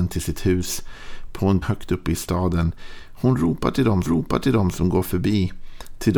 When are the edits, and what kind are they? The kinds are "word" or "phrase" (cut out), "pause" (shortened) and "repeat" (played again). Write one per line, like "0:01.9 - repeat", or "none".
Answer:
0:01.6 - word
0:04.1 - repeat